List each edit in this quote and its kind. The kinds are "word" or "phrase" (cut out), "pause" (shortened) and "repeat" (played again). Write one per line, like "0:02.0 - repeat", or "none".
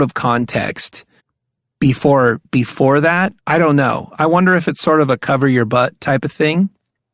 0:01.2 - pause
0:03.4 - pause